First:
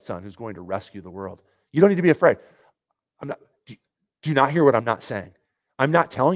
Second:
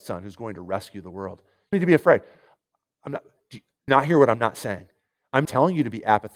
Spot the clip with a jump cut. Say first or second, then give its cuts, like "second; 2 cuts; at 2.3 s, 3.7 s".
second; 3 cuts; at 1.7 s, 3.9 s, 5.4 s